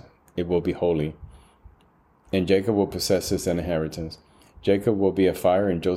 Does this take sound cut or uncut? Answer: uncut